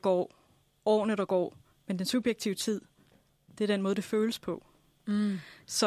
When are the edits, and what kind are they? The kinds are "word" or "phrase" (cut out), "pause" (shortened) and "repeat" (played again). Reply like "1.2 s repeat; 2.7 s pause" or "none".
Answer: none